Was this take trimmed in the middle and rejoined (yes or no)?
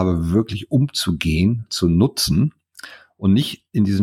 yes